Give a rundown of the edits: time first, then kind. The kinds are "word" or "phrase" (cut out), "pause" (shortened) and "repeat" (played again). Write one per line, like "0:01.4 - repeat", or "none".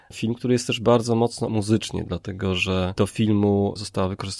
0:01.5 - word